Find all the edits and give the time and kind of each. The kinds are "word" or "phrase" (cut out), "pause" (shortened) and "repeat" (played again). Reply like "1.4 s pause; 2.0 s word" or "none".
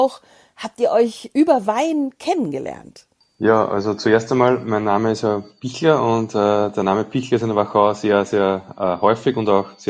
none